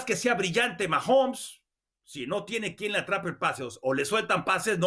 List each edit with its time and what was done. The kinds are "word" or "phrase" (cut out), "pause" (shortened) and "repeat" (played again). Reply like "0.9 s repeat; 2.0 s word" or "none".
none